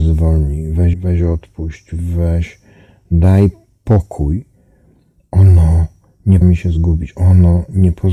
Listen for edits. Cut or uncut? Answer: cut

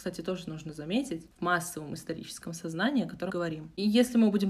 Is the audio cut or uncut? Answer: cut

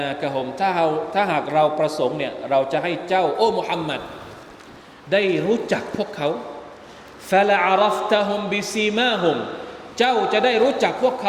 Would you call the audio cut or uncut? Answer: uncut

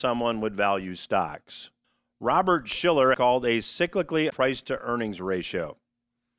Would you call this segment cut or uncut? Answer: cut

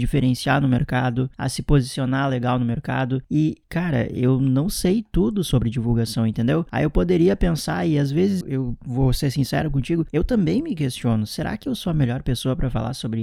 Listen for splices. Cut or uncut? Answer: cut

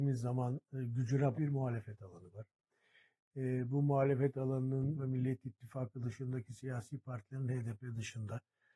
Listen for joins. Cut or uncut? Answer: cut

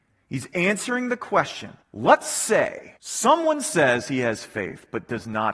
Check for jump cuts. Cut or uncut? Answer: cut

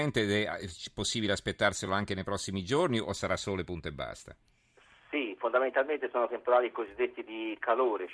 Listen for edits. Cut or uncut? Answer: uncut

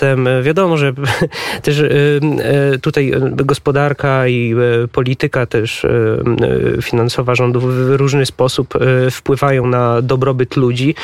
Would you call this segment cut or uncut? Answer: uncut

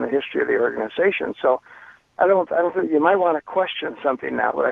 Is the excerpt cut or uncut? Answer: uncut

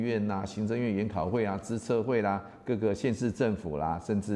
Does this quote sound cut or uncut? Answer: uncut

